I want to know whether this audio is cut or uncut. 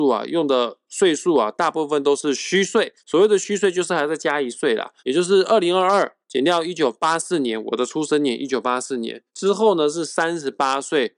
cut